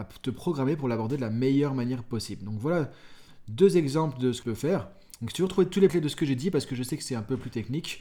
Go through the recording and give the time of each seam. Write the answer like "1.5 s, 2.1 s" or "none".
4.4 s, 5.9 s